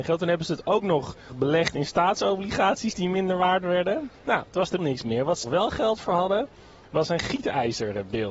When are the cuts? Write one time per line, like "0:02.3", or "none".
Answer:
0:01.3
0:04.1
0:04.8
0:05.4